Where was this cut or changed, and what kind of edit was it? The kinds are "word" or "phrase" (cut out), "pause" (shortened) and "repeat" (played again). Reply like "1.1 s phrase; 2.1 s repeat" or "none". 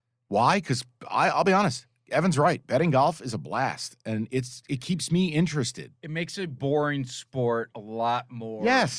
none